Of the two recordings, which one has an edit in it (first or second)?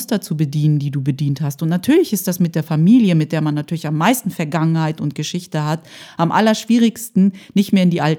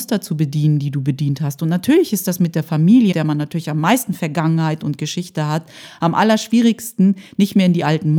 second